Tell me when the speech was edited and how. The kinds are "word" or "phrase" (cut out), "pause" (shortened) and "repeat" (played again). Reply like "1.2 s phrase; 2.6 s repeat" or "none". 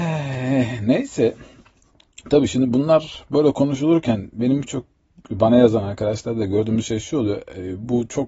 none